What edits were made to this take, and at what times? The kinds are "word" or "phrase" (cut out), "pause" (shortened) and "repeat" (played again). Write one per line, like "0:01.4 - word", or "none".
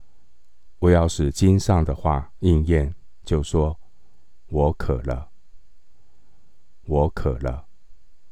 0:06.8 - repeat